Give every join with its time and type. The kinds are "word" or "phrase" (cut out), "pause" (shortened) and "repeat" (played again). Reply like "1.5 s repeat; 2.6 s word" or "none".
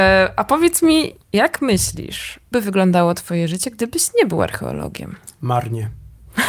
1.2 s pause; 2.5 s word

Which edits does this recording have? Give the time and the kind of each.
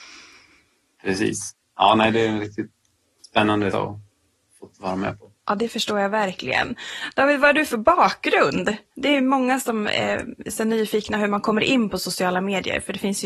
1.6 s pause; 3.7 s word; 5.4 s pause

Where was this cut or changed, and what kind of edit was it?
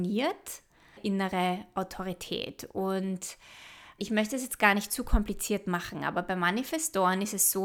1.0 s phrase; 4.0 s word

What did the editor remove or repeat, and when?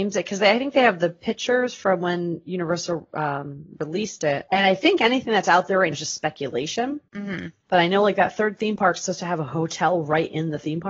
5.9 s word

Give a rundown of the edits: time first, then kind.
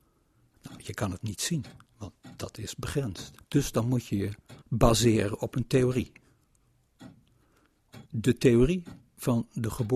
1.9 s pause; 3.4 s pause; 4.6 s pause; 8.1 s pause

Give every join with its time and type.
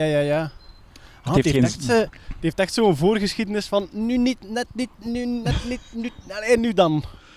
none

